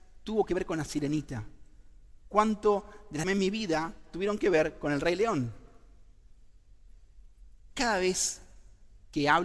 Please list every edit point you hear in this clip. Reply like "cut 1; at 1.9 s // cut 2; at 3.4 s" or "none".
cut 1; at 2.2 s // cut 2; at 3.2 s